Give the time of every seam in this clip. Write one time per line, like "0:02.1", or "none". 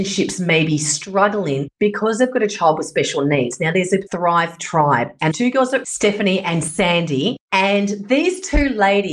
0:04.1
0:05.3
0:05.8